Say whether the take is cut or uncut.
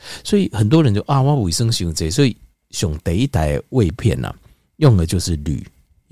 uncut